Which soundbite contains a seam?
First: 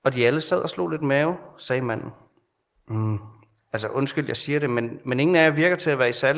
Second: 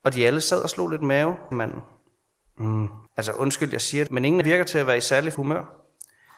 second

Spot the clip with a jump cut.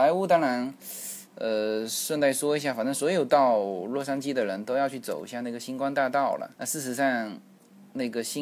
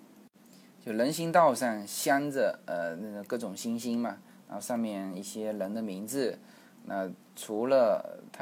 first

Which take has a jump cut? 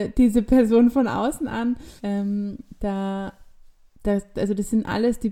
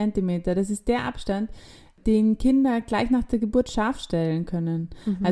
first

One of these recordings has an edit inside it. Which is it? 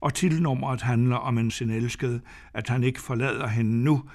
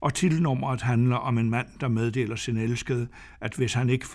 first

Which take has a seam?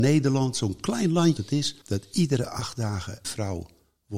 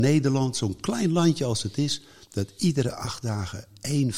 first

